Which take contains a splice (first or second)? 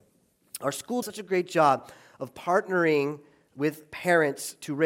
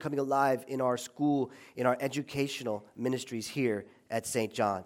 first